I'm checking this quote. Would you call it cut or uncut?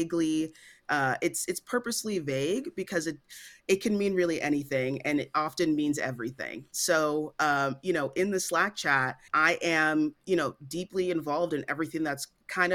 uncut